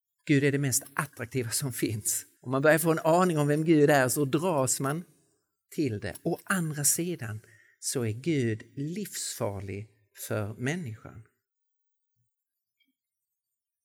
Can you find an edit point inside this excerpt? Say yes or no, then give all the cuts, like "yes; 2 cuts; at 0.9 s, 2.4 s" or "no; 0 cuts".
yes; 1 cut; at 2.4 s